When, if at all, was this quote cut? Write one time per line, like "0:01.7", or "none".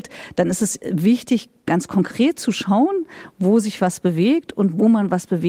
none